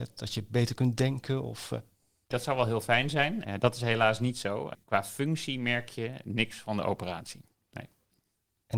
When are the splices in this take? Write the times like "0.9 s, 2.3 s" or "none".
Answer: none